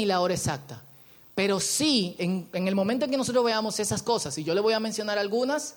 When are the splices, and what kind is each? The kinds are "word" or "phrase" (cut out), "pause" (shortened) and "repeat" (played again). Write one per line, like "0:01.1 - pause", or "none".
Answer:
none